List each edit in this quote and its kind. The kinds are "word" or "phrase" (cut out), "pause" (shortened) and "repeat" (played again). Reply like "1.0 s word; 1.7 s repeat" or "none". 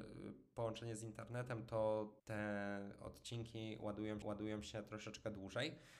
2.2 s pause; 4.2 s repeat